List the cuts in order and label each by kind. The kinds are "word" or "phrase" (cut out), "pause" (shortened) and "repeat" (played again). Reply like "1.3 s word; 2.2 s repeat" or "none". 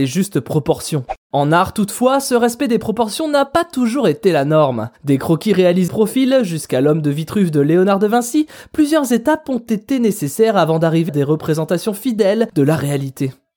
5.0 s pause; 5.9 s word; 11.1 s word

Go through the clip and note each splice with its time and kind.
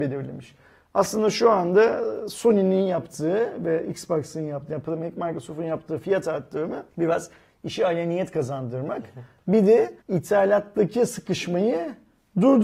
6.9 s pause; 10.0 s pause

